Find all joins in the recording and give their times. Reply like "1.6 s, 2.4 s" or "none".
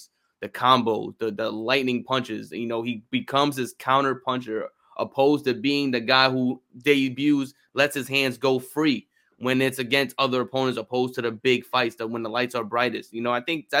none